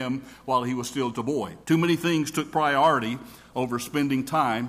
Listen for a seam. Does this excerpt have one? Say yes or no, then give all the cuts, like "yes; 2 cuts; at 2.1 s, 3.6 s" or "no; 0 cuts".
yes; 2 cuts; at 1.1 s, 1.6 s